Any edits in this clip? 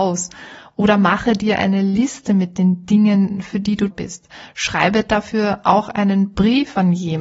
yes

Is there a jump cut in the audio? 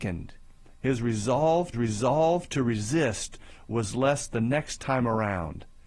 yes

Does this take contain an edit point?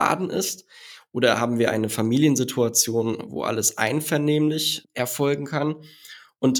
no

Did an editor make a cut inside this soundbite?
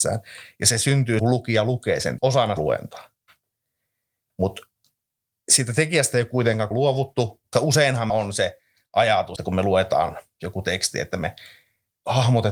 yes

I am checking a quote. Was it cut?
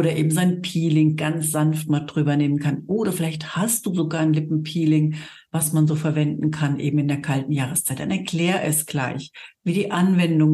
no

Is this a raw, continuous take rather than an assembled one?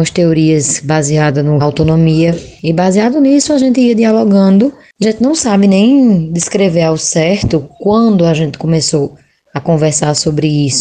no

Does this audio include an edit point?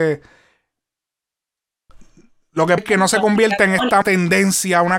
yes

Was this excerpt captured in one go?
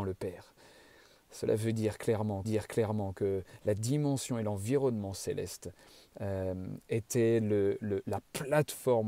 no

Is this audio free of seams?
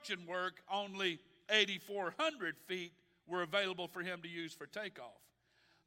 yes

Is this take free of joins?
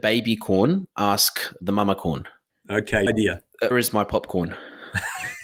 no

